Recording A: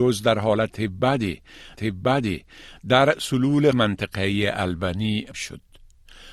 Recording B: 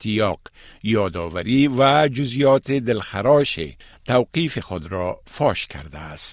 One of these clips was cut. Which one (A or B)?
A